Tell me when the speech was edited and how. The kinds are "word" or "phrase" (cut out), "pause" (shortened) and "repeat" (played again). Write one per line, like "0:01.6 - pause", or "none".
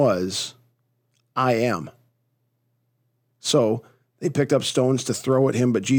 none